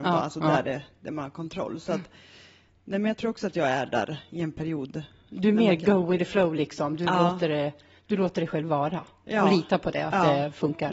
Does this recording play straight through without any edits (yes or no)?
yes